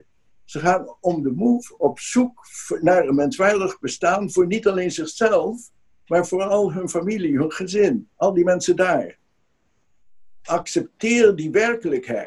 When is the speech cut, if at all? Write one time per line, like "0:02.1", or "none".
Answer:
0:08.1